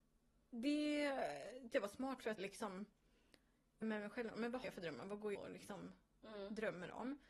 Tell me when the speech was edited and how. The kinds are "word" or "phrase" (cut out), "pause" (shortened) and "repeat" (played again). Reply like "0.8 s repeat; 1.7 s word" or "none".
1.7 s word; 2.4 s word; 3.8 s word; 4.6 s word; 5.3 s word